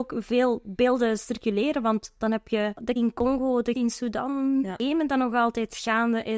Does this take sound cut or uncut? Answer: cut